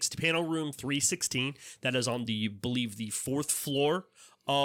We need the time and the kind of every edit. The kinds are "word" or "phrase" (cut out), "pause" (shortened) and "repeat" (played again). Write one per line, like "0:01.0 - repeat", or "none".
none